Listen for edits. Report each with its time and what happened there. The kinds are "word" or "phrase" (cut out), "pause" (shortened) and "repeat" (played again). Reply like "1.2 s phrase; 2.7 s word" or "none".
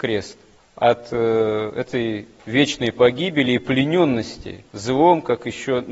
4.7 s pause